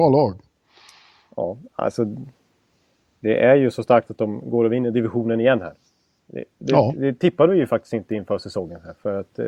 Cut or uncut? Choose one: uncut